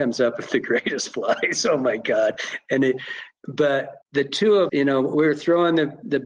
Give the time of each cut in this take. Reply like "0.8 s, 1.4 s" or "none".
4.0 s, 4.7 s

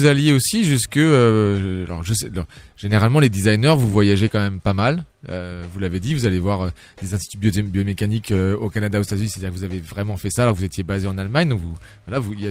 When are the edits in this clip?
none

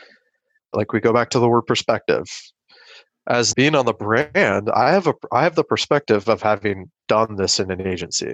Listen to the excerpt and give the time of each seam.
3.5 s

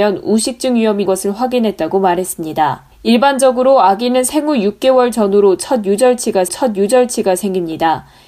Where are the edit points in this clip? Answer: 1.1 s, 2.9 s, 6.5 s

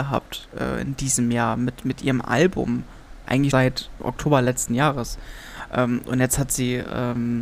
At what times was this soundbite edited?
1.8 s, 3.5 s, 4.0 s

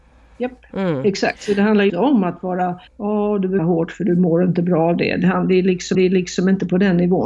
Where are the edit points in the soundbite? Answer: 1.9 s, 2.9 s, 3.6 s, 5.9 s

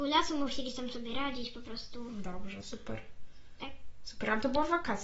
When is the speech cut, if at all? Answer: 2.6 s

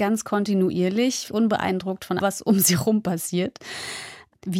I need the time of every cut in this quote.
1.3 s, 2.2 s

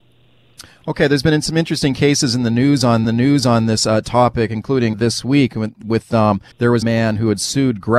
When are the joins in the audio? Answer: 3.0 s, 4.9 s, 6.5 s, 6.8 s

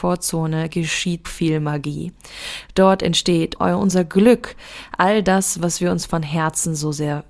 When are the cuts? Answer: 1.2 s, 3.6 s

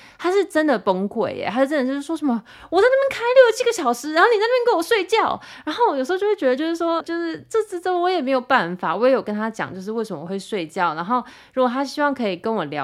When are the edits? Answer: 7.0 s

